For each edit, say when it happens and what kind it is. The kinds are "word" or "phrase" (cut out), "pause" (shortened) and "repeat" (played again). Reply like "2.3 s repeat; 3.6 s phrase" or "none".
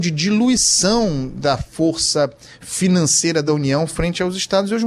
none